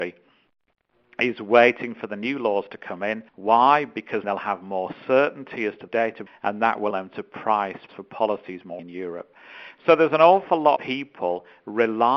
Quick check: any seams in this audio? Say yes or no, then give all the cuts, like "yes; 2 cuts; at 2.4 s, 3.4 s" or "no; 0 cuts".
yes; 8 cuts; at 3.3 s, 4.2 s, 5.9 s, 6.3 s, 6.9 s, 7.9 s, 8.8 s, 10.8 s